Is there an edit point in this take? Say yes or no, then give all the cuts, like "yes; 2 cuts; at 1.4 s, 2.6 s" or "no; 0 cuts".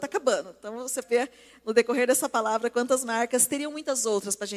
yes; 1 cut; at 1.0 s